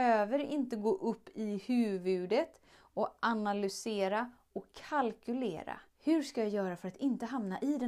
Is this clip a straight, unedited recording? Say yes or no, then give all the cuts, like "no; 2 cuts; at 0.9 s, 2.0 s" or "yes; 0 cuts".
no; 1 cut; at 5.9 s